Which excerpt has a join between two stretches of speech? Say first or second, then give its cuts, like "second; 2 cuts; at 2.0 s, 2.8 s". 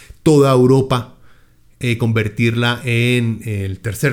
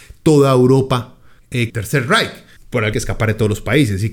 second; 4 cuts; at 1.4 s, 1.7 s, 2.6 s, 2.9 s